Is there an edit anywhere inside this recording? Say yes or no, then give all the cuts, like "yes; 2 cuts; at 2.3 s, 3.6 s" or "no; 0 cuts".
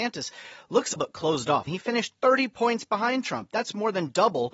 yes; 2 cuts; at 1.0 s, 1.7 s